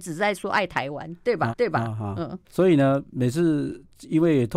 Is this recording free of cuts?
no; 2 cuts; at 1.5 s, 2.4 s

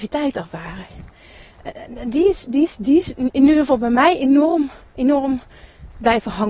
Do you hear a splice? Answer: no; 0 cuts

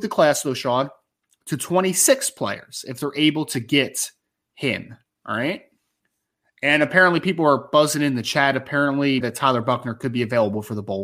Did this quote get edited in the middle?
yes; 1 cut; at 9.2 s

